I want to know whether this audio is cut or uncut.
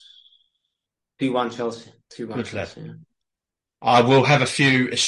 cut